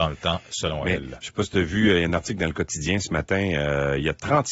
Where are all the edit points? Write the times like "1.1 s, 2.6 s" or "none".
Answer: none